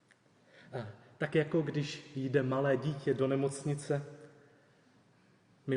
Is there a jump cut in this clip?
no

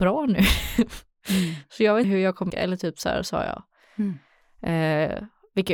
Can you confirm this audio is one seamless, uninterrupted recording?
no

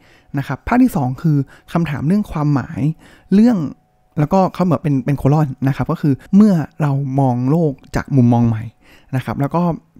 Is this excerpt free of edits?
no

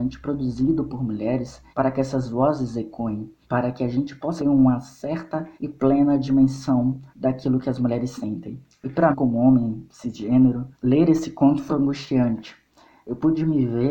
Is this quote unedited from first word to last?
no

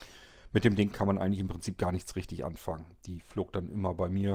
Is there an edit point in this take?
no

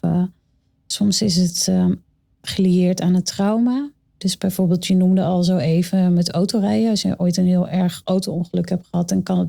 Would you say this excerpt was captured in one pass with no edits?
yes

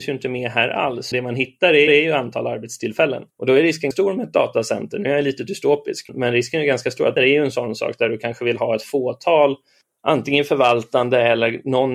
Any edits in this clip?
yes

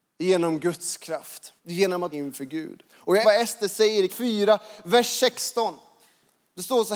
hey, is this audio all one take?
no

